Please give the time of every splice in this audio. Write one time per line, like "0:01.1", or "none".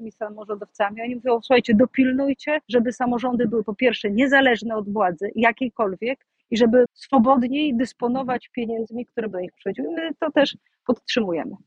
0:02.6
0:06.9
0:09.3